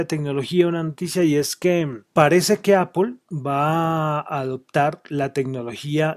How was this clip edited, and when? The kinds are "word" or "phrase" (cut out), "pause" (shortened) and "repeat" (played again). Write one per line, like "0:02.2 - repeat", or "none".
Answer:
0:02.1 - pause
0:03.2 - pause